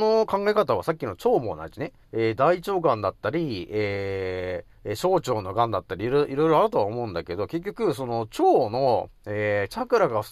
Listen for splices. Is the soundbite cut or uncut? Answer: cut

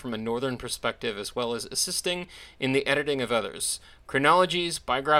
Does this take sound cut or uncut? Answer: uncut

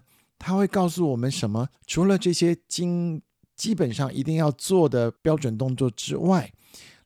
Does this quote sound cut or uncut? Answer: cut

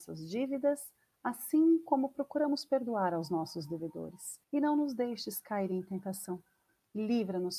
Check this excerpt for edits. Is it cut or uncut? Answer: cut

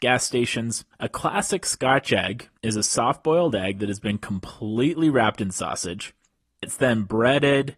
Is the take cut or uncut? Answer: cut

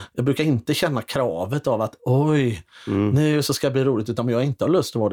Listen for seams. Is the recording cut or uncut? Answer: uncut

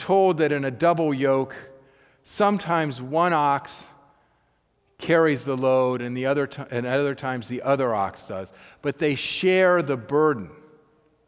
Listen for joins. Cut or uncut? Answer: uncut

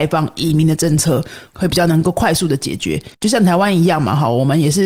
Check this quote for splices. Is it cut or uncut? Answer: cut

